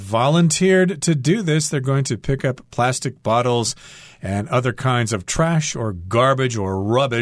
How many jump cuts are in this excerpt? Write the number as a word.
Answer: zero